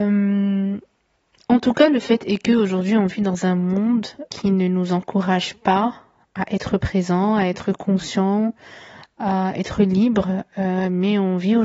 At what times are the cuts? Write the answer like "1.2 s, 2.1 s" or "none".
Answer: 4.3 s